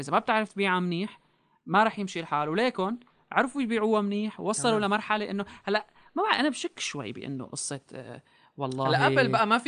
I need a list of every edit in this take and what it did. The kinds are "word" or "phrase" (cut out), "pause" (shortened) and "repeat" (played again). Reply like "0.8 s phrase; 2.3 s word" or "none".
none

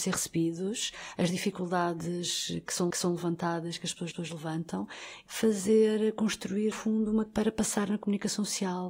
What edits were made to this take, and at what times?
2.9 s repeat; 4.1 s repeat; 5.3 s phrase; 6.7 s word; 7.3 s word

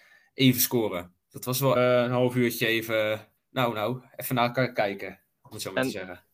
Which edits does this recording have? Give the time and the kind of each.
1.2 s pause; 1.8 s word; 3.4 s pause

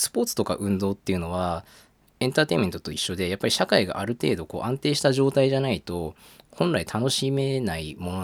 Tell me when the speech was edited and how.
none

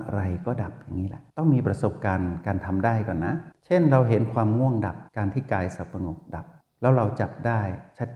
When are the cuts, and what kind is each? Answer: 1.3 s pause; 3.5 s pause; 5.1 s pause; 6.6 s pause

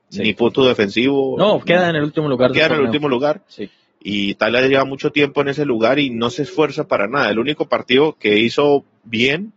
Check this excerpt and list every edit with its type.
none

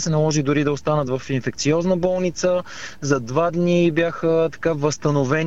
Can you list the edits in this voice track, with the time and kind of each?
none

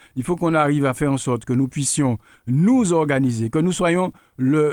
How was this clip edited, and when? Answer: none

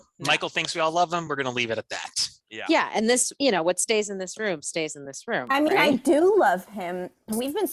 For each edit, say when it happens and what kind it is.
none

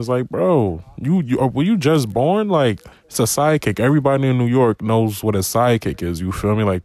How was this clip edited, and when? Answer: 2.9 s pause

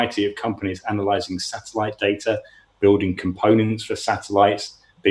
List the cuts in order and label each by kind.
none

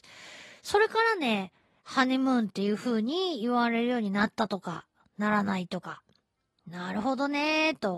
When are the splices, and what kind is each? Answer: none

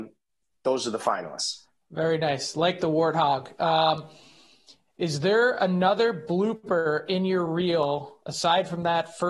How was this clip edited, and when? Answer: none

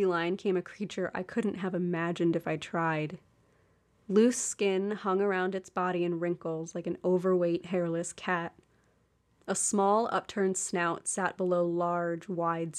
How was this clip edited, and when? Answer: none

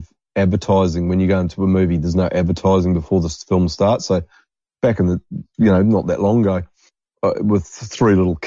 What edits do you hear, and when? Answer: none

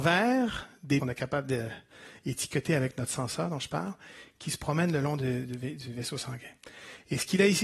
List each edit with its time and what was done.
1.0 s phrase

